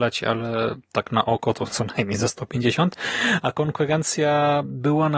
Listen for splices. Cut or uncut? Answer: uncut